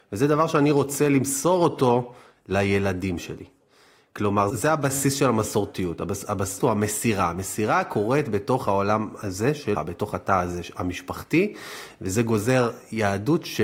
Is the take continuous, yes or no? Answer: no